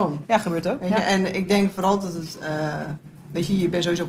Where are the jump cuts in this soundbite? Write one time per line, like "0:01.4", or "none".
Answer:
none

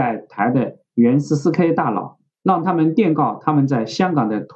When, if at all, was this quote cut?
0:02.3

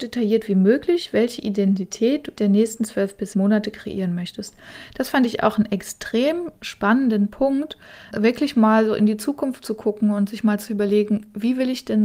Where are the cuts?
0:02.4
0:03.3
0:08.1

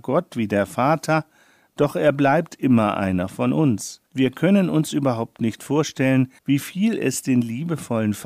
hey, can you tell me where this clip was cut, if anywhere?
0:04.1
0:06.4

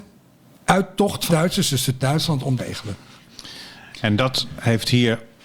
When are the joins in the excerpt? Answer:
0:01.3
0:02.0
0:02.6

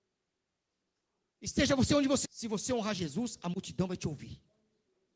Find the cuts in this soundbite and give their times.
0:02.2

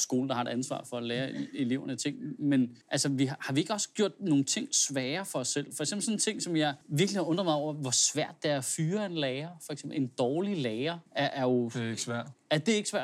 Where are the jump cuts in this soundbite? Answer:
0:02.8
0:06.8
0:11.1

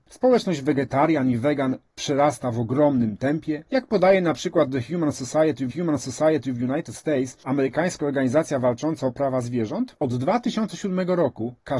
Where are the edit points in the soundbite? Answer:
0:03.7
0:05.7

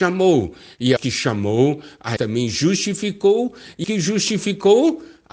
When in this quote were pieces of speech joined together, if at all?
0:01.0
0:02.2
0:03.8

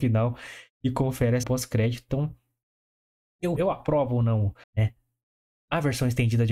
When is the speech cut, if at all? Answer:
0:01.4
0:03.6
0:04.6

